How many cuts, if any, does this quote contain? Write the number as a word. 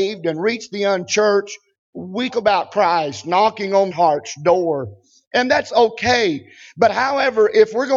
two